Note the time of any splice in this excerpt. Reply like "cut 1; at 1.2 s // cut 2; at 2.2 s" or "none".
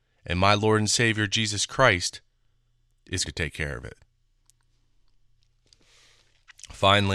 cut 1; at 3.2 s